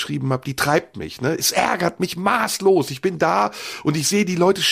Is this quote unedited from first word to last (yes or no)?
yes